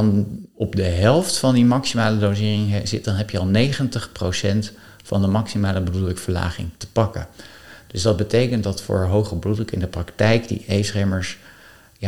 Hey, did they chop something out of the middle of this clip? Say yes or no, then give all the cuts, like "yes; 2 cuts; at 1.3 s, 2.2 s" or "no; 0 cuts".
no; 0 cuts